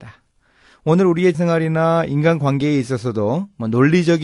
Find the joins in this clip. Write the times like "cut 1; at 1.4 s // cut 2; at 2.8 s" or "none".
cut 1; at 1.3 s